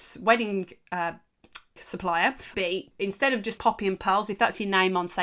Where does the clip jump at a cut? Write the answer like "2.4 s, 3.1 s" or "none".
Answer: 1.8 s, 2.5 s, 2.9 s, 3.6 s

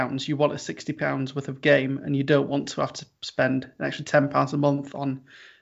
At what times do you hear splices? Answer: none

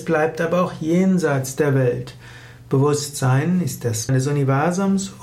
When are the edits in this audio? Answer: 4.1 s

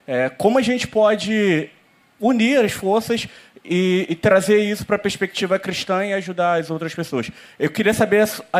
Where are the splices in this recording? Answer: none

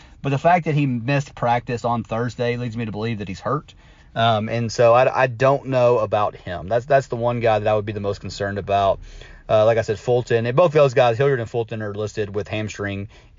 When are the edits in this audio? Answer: none

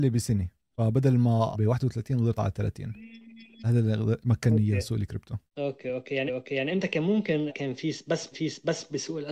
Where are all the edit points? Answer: 1.5 s, 2.4 s, 3.6 s, 5.5 s, 6.3 s, 7.5 s, 8.3 s

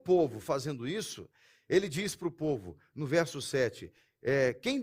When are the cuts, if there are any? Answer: none

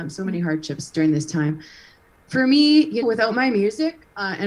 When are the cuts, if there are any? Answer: 3.0 s

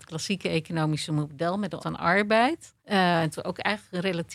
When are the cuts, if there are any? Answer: 1.8 s, 2.8 s, 3.4 s

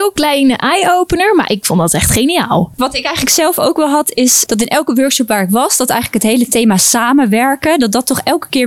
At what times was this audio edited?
4.5 s

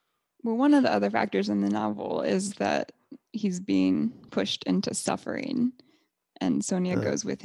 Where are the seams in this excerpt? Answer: none

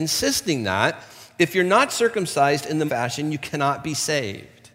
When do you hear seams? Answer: 2.9 s

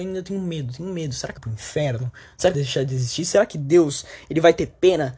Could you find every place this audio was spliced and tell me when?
1.4 s, 2.5 s

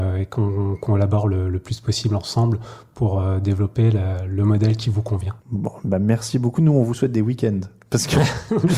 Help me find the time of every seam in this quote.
5.4 s

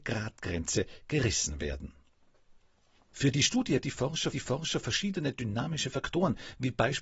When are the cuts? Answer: 3.8 s, 4.3 s

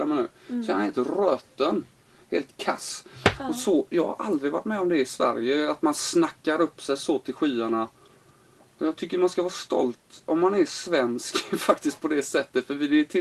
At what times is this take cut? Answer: none

